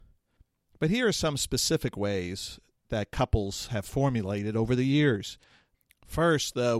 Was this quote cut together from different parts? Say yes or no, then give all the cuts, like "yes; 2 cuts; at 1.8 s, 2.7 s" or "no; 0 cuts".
no; 0 cuts